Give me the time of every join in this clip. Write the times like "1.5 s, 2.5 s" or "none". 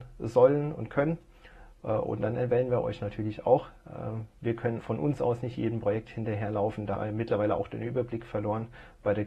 4.8 s, 7.0 s